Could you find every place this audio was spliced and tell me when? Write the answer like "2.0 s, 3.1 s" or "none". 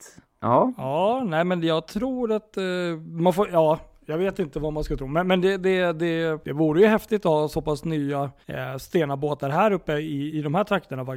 6.4 s, 8.4 s